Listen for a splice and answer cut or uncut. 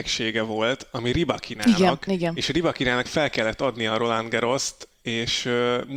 cut